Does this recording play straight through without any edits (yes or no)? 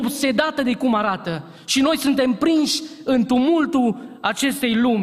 yes